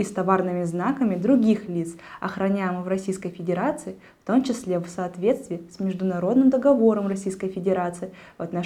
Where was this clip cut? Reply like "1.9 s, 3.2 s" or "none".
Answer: none